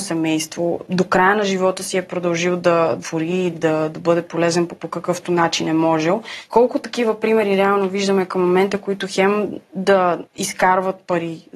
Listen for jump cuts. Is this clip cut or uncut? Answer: cut